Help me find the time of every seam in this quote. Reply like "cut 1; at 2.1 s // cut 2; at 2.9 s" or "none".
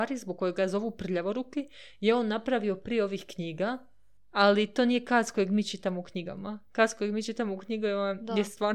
none